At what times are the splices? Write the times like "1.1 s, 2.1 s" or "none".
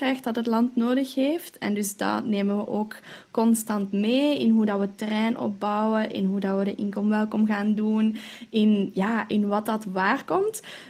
none